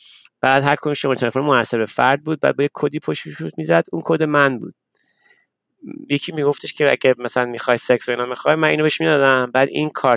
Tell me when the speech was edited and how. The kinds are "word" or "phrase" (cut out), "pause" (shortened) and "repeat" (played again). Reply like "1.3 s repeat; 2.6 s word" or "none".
none